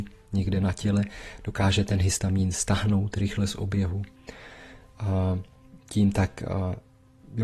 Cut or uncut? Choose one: uncut